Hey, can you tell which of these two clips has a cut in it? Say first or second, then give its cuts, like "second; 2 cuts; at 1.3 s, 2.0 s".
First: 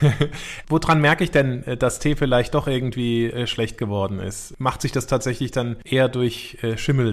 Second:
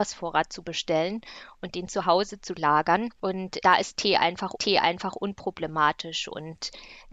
second; 1 cut; at 4.6 s